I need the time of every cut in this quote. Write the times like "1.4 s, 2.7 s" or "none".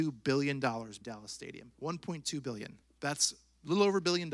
1.0 s, 1.7 s, 2.8 s